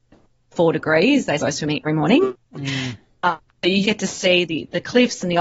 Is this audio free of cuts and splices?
no; 3 cuts; at 1.4 s, 1.8 s, 3.8 s

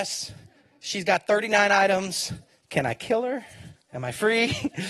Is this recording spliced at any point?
yes; 2 cuts; at 2.5 s, 3.8 s

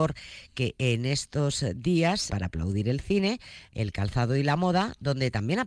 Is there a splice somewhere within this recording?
yes; 1 cut; at 2.3 s

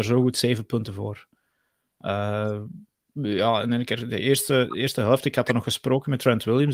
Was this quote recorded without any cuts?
yes; 0 cuts

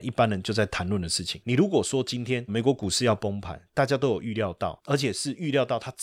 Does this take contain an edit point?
yes; 1 cut; at 2.5 s

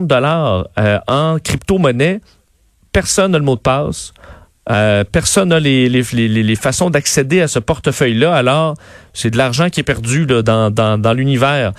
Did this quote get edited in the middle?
no; 0 cuts

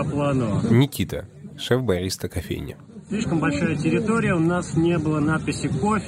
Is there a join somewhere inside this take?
no; 0 cuts

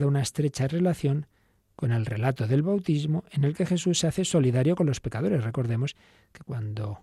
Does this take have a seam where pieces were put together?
no; 0 cuts

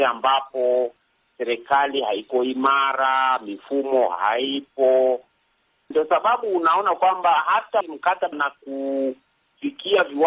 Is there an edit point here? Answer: yes; 3 cuts; at 5.9 s, 7.8 s, 8.3 s

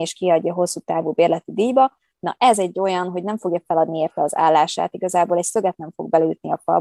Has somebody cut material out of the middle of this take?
no; 0 cuts

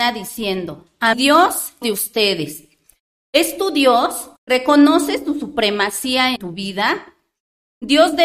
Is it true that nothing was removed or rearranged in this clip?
no; 4 cuts; at 1.1 s, 1.8 s, 4.4 s, 6.4 s

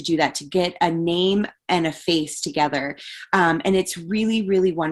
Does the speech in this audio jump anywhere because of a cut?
no; 0 cuts

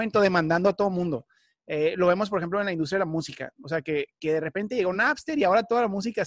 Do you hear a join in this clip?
no; 0 cuts

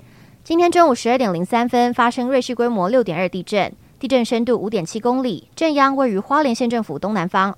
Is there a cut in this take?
no; 0 cuts

